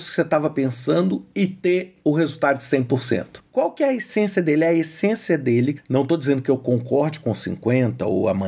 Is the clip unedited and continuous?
no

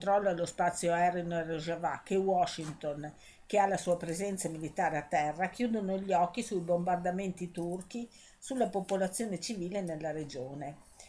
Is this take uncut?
yes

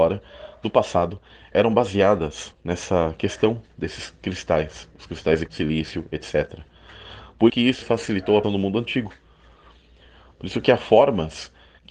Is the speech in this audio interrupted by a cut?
yes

